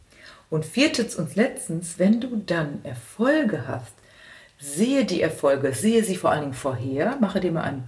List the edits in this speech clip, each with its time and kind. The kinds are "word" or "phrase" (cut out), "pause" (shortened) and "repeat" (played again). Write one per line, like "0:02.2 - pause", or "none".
none